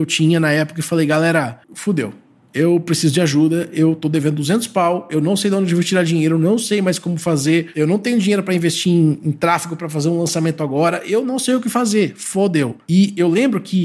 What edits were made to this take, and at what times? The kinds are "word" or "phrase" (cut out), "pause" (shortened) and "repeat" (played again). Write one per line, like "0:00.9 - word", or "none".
0:01.6 - pause